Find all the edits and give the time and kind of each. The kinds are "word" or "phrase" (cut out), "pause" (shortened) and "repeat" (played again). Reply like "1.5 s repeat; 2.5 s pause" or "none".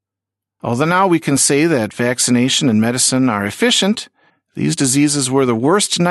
4.3 s pause